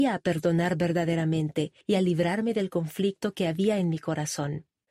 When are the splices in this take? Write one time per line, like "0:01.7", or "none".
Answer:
0:01.8